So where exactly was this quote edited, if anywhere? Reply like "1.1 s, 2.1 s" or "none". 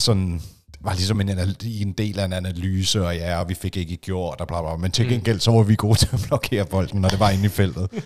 none